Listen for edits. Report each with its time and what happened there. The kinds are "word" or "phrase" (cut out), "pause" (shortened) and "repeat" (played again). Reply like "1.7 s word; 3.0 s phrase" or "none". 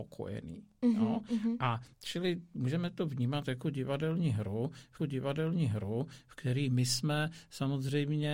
1.9 s pause; 5.0 s repeat